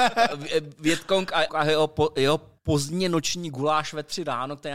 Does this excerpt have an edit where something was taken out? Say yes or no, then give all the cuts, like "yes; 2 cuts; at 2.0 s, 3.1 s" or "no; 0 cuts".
yes; 2 cuts; at 1.5 s, 2.6 s